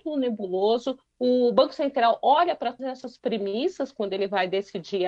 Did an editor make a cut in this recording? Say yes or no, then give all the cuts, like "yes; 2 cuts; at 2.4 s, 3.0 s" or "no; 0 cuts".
yes; 1 cut; at 2.8 s